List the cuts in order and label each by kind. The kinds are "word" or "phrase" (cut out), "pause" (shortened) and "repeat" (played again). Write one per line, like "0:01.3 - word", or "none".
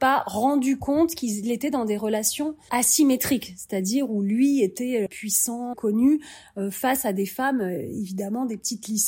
0:02.7 - word
0:05.1 - word
0:05.7 - word